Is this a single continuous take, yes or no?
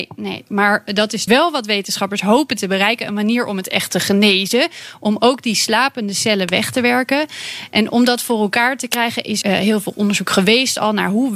no